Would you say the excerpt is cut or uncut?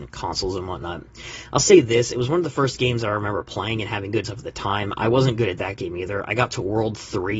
cut